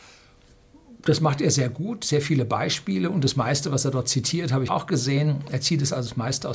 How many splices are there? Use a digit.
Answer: 1